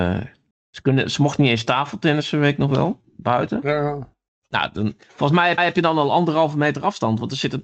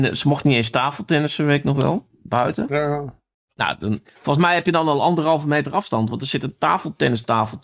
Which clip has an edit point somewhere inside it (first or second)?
first